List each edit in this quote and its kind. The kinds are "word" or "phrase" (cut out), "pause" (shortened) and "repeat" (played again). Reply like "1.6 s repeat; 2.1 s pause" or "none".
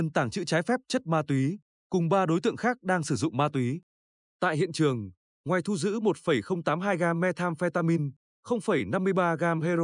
none